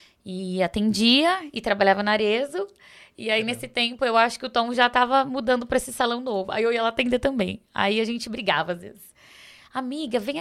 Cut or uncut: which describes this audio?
uncut